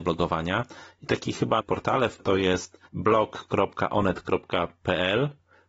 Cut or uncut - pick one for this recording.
cut